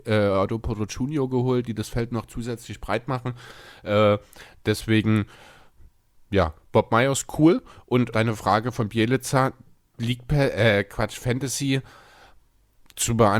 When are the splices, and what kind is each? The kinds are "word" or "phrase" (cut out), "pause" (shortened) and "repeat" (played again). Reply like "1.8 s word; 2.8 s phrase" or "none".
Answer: 8.1 s word